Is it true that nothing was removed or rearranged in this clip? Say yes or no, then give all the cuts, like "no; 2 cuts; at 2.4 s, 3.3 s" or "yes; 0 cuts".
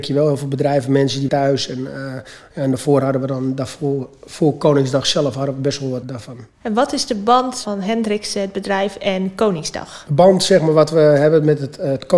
no; 3 cuts; at 1.3 s, 6.0 s, 6.5 s